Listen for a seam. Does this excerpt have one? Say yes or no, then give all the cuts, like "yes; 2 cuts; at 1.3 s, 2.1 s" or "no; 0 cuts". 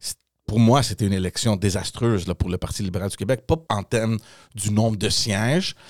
yes; 1 cut; at 3.7 s